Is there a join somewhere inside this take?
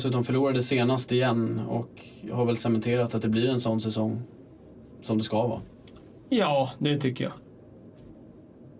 no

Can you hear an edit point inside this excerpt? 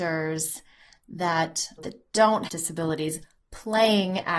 yes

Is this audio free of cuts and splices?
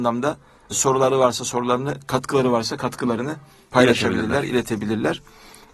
yes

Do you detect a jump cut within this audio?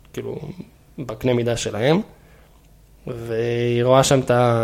no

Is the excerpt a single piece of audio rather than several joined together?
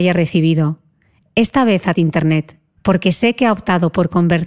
no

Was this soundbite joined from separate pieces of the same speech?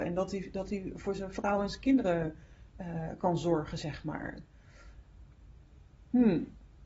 no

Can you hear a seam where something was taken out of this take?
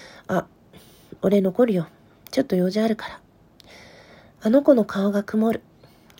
no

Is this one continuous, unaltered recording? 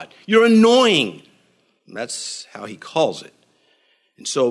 yes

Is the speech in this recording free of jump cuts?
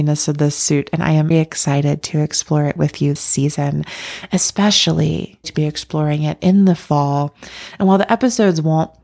no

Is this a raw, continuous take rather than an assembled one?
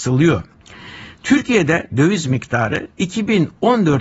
no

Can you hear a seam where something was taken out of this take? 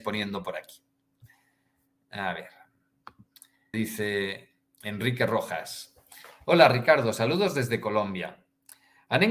yes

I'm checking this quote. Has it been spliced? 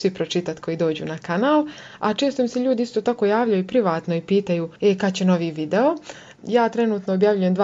yes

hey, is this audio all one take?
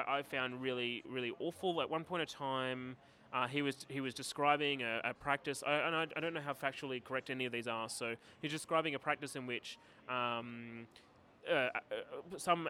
no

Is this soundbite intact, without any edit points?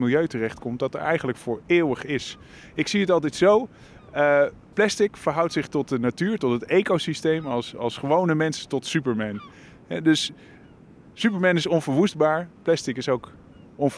yes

